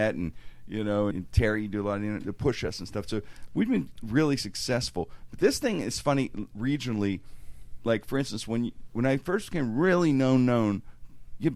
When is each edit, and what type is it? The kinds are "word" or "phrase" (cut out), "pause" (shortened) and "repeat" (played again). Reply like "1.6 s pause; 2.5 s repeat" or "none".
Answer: 1.1 s phrase